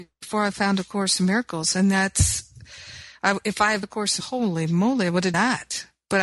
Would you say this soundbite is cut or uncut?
cut